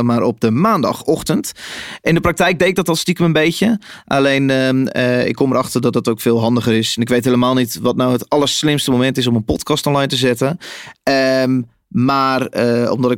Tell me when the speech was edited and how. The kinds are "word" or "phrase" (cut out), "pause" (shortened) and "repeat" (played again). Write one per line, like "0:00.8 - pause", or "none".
none